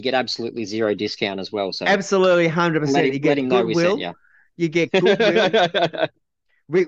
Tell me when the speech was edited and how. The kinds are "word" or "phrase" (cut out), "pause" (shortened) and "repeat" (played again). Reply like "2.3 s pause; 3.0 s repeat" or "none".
none